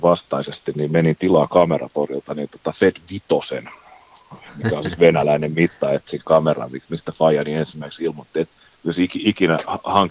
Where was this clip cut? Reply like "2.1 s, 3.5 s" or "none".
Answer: 8.7 s